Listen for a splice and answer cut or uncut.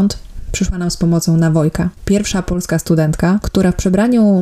cut